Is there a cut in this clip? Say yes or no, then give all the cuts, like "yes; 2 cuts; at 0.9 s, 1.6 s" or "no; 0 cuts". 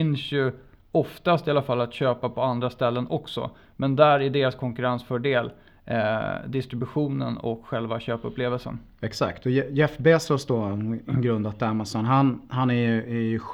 no; 0 cuts